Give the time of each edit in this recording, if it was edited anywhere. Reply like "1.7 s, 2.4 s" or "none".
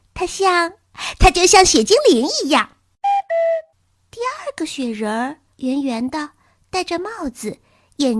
5.5 s